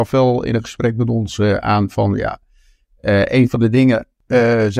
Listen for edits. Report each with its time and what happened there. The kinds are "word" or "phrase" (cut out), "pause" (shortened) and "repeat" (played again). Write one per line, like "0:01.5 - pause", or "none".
none